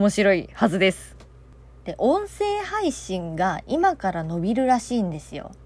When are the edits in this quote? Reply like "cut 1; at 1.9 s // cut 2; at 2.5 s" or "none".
none